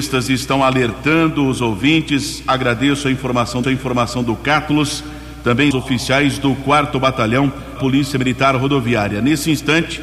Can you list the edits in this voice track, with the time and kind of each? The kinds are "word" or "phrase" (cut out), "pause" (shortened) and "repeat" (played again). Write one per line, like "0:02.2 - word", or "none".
0:03.6 - repeat
0:05.7 - phrase
0:07.8 - word